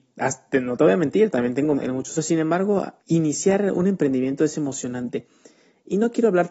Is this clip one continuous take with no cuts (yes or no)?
no